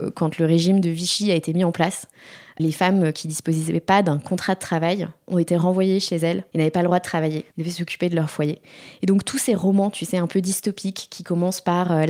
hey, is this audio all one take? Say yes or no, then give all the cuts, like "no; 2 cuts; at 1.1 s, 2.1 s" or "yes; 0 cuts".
no; 2 cuts; at 6.5 s, 7.5 s